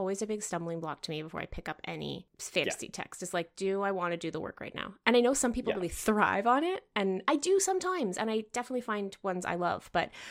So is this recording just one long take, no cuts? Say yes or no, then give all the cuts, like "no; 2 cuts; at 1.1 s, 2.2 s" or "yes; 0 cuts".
yes; 0 cuts